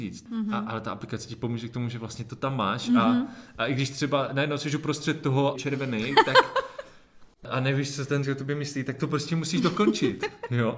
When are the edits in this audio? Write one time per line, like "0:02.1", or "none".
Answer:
0:05.5
0:08.2